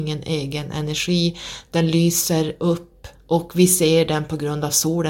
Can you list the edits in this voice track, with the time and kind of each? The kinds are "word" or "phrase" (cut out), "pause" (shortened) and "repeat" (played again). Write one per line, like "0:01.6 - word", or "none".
0:03.1 - pause